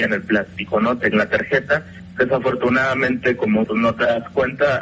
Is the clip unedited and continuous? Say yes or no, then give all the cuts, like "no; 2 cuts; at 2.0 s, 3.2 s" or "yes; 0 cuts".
no; 2 cuts; at 1.1 s, 3.6 s